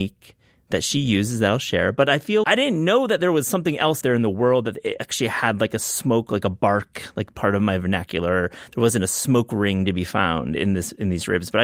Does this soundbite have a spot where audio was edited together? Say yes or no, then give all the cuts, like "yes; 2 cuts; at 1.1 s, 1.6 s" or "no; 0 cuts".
yes; 3 cuts; at 2.4 s, 4.0 s, 7.3 s